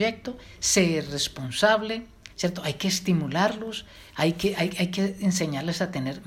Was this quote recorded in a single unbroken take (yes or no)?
no